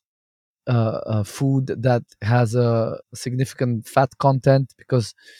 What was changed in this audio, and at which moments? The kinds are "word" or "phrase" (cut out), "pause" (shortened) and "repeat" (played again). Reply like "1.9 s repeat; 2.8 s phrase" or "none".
3.0 s pause